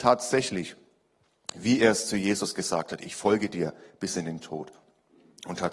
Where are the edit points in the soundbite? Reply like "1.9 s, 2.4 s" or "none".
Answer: none

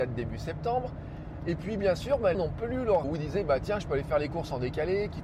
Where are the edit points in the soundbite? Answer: 2.3 s, 3.0 s

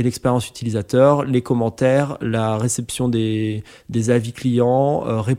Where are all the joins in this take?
none

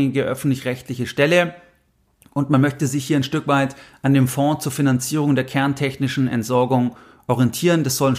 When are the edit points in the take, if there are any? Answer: none

